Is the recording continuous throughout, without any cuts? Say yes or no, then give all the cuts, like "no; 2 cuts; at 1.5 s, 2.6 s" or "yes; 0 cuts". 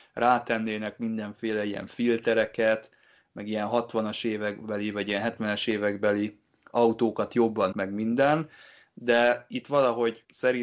no; 1 cut; at 7.7 s